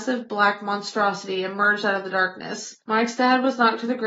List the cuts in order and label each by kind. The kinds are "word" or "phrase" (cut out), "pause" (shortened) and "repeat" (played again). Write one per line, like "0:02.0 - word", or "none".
0:02.8 - pause